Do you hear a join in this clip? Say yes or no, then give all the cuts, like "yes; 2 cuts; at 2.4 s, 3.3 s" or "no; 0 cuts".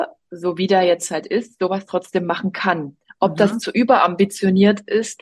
no; 0 cuts